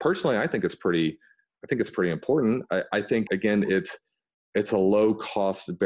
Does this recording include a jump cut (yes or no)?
yes